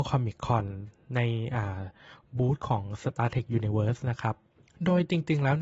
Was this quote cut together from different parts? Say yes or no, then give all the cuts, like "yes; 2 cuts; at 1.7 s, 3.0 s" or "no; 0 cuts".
no; 0 cuts